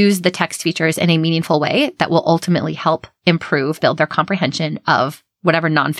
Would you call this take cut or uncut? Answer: cut